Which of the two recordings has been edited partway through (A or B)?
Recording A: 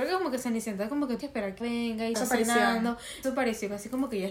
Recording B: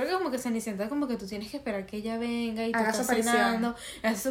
A